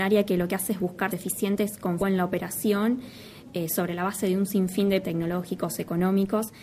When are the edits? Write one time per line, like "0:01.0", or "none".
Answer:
0:01.1
0:02.0
0:05.0